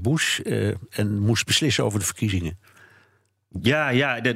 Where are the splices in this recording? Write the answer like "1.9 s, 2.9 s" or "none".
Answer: none